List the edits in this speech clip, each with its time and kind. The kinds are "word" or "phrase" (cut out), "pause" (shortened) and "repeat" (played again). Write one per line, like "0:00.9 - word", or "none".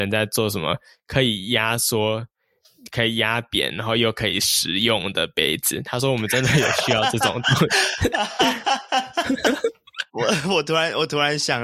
0:10.1 - word